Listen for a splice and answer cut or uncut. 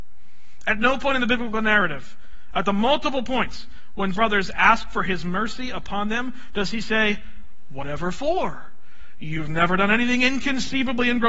cut